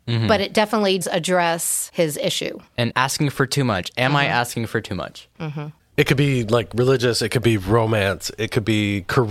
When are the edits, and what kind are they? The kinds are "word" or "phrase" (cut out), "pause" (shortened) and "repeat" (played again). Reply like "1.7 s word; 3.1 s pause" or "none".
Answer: 1.0 s word; 2.7 s pause